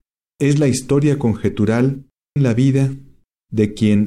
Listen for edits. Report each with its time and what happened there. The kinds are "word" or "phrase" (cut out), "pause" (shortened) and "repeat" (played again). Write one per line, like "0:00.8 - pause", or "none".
0:02.4 - phrase